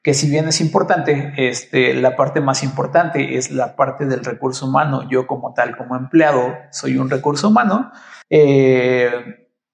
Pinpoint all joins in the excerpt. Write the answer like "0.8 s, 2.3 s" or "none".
8.2 s

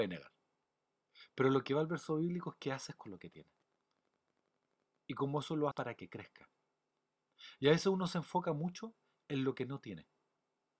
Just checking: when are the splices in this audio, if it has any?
5.7 s

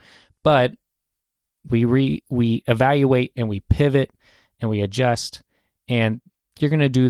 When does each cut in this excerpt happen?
none

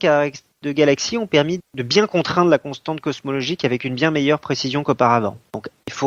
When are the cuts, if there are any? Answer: 1.6 s

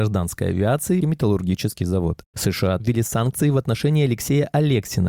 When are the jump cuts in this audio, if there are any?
1.0 s, 2.8 s

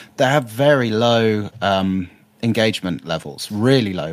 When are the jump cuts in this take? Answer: none

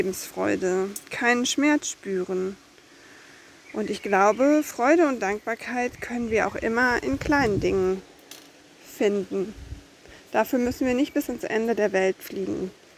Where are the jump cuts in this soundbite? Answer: none

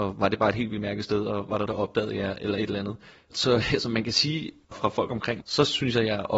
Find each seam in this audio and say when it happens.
1.7 s, 4.7 s, 5.4 s

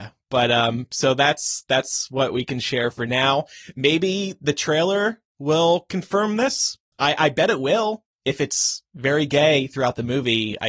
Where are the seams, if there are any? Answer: 6.9 s, 8.1 s

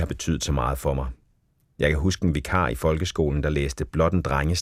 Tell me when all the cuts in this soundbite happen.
none

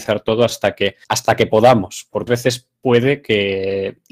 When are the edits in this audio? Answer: 1.0 s, 2.3 s

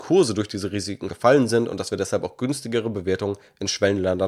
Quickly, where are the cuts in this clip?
1.1 s

